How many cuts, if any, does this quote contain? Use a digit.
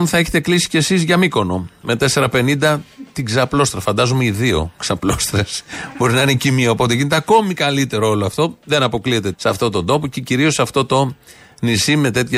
1